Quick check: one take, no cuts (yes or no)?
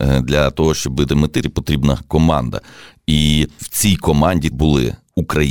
no